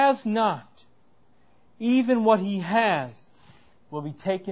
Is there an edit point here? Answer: no; 0 cuts

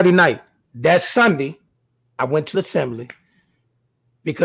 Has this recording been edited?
yes; 2 cuts; at 1.7 s, 2.5 s

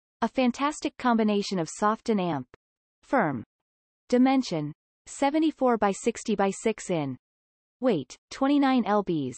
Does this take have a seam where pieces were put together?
yes; 1 cut; at 8.2 s

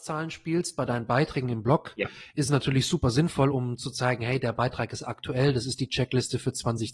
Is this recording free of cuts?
yes; 0 cuts

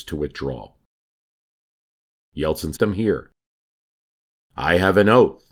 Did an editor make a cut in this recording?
yes; 1 cut; at 2.8 s

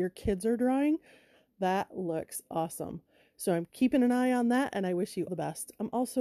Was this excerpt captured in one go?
no; 1 cut; at 5.3 s

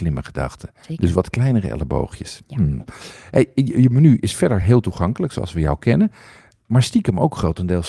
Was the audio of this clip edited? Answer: no; 0 cuts

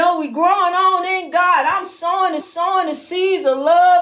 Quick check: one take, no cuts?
no; 1 cut; at 2.4 s

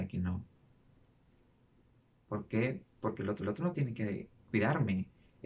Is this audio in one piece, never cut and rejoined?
no; 1 cut; at 3.4 s

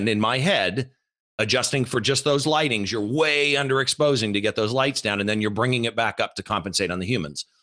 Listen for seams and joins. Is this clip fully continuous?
yes; 0 cuts

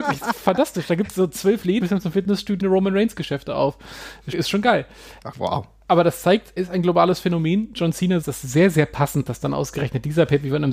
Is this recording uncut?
no; 6 cuts; at 1.8 s, 2.6 s, 4.3 s, 5.3 s, 6.6 s, 8.2 s

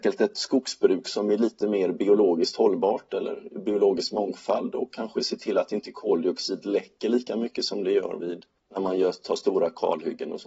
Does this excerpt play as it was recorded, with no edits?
yes; 0 cuts

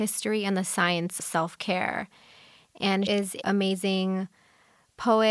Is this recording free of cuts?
no; 3 cuts; at 1.2 s, 3.1 s, 3.4 s

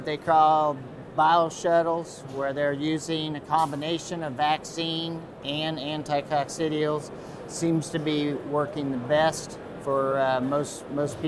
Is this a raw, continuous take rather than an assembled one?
yes; 0 cuts

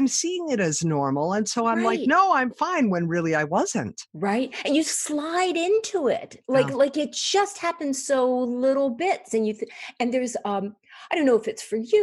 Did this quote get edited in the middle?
yes; 1 cut; at 4.1 s

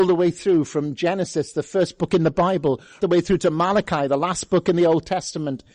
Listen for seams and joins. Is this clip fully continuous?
no; 1 cut; at 3.0 s

